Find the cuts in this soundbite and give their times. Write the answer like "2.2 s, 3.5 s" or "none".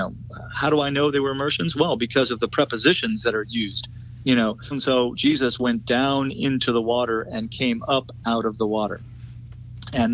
4.7 s